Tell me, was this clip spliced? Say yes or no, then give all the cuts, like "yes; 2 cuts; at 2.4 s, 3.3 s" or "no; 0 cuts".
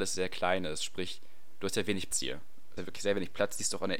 yes; 2 cuts; at 2.1 s, 2.8 s